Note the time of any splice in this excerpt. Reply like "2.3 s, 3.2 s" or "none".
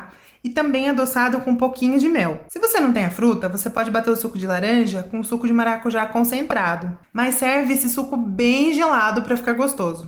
none